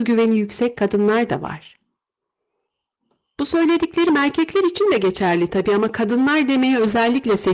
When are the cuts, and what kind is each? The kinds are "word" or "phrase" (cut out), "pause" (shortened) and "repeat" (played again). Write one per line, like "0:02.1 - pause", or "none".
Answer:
none